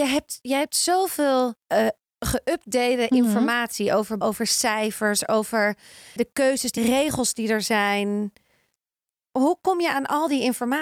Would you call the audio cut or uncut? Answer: cut